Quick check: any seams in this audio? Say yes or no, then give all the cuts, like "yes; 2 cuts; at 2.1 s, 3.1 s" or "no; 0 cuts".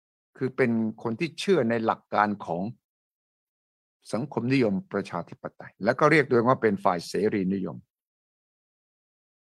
yes; 1 cut; at 5.8 s